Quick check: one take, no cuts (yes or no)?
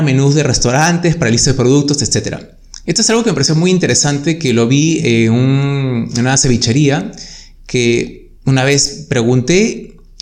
no